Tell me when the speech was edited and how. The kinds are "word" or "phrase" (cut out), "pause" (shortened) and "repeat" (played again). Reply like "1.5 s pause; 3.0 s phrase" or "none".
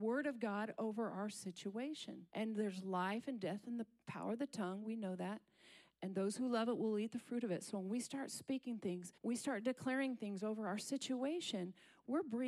2.3 s pause; 9.2 s pause